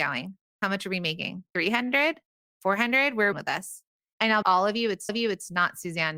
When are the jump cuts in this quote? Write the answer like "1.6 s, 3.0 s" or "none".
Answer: 2.3 s, 3.3 s, 4.4 s, 5.1 s